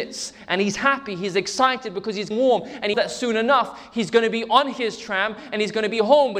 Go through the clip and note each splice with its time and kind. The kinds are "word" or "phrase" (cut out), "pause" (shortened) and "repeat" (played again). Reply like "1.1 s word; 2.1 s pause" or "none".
2.3 s word; 2.9 s word